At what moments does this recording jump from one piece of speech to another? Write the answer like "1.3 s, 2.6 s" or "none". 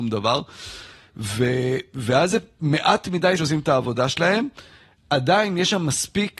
3.4 s